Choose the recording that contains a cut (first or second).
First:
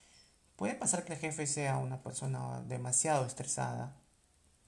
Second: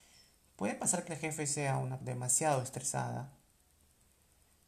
second